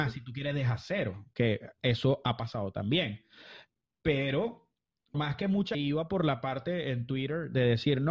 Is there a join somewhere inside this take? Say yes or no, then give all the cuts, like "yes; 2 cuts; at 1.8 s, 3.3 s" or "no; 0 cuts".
yes; 2 cuts; at 5.1 s, 5.7 s